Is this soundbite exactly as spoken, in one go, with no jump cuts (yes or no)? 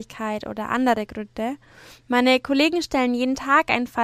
yes